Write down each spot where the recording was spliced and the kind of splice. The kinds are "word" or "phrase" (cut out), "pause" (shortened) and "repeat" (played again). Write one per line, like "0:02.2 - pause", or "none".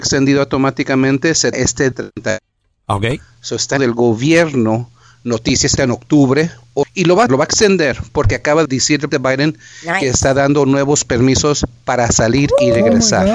0:01.5 - word
0:01.9 - word
0:03.8 - word
0:05.8 - word
0:06.8 - word
0:07.3 - word
0:08.7 - word
0:09.1 - word